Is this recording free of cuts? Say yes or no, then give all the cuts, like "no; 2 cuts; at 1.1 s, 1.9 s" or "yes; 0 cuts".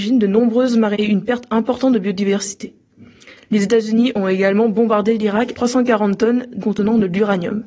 no; 3 cuts; at 0.9 s, 5.5 s, 6.6 s